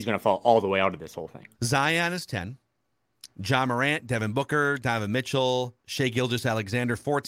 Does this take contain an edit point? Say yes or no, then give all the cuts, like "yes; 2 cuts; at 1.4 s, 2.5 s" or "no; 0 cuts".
yes; 2 cuts; at 1.5 s, 5.8 s